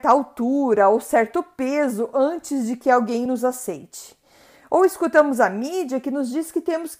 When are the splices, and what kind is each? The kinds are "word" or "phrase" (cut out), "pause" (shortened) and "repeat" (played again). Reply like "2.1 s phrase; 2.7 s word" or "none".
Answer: none